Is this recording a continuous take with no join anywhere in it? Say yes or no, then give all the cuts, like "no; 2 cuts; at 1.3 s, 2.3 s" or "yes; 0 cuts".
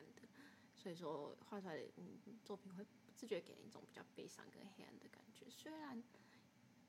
yes; 0 cuts